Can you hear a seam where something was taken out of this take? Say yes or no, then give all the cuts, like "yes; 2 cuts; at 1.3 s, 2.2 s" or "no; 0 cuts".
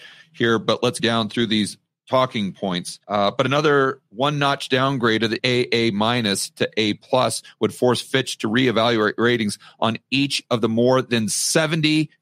yes; 3 cuts; at 1.0 s, 3.0 s, 5.4 s